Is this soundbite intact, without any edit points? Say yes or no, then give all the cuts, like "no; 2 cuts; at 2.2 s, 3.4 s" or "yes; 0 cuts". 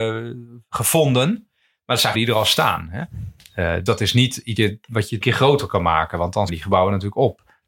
no; 5 cuts; at 2.1 s, 3.9 s, 4.6 s, 5.2 s, 6.5 s